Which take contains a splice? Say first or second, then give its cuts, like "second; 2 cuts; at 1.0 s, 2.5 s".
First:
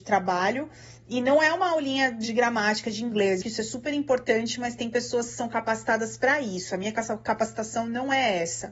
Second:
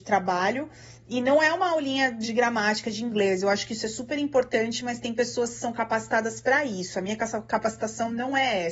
first; 1 cut; at 3.4 s